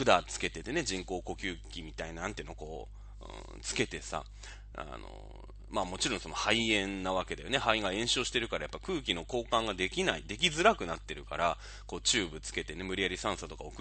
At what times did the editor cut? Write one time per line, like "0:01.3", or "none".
none

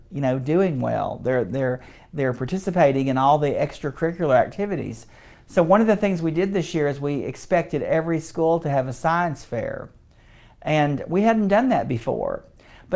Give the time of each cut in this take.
none

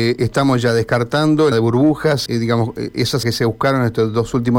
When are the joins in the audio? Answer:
0:01.5
0:02.3
0:03.2

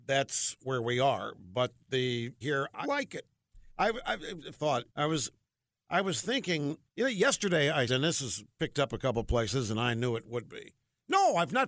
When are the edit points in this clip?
0:02.4
0:02.8
0:03.7
0:04.5
0:04.9
0:05.4
0:06.9
0:07.9

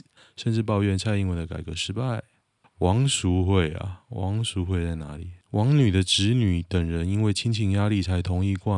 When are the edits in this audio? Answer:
0:02.6
0:05.4

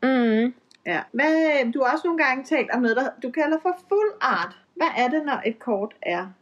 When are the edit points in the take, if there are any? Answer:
0:01.1
0:04.6

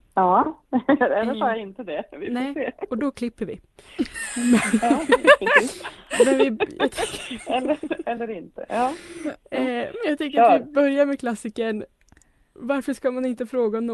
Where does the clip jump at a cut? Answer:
none

